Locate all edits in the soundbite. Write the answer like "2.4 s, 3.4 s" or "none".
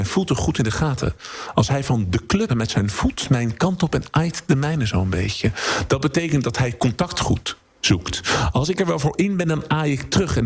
2.5 s